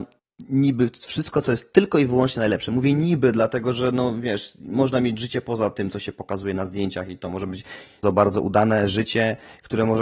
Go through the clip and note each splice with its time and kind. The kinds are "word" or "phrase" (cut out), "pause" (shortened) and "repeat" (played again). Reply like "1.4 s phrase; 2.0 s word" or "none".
8.0 s word

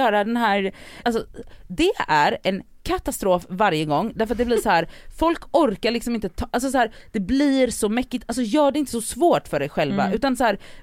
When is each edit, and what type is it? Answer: 1.0 s word

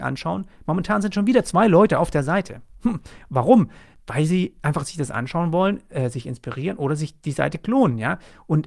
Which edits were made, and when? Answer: none

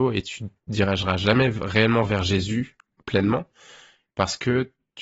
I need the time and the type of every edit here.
none

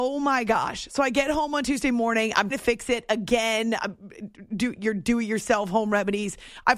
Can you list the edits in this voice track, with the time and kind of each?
2.5 s word

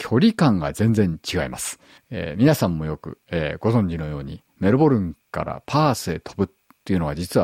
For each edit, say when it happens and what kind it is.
2.0 s pause

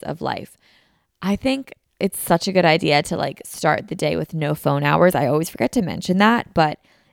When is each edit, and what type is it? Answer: none

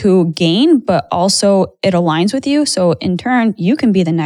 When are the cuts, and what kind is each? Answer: none

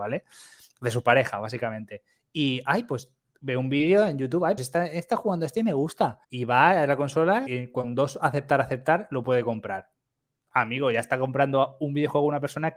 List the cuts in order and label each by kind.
4.6 s word; 6.2 s pause; 7.5 s word

